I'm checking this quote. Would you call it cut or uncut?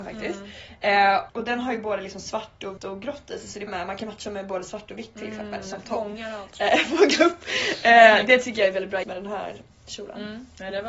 cut